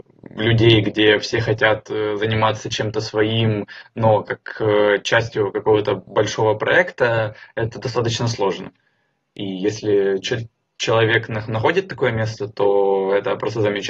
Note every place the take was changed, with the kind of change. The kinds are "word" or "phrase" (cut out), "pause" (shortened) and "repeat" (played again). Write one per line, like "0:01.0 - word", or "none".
none